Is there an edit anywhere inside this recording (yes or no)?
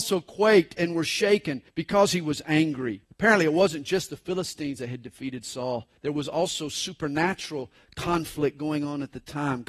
yes